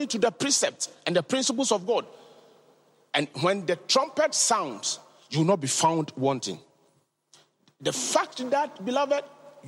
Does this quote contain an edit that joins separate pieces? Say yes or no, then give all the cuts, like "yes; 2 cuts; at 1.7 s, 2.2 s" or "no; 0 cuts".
no; 0 cuts